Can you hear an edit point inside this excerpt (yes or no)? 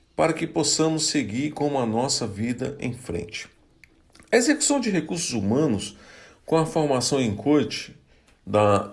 no